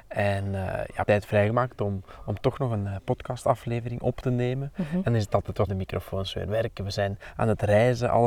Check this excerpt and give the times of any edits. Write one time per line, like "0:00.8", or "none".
0:01.0
0:05.7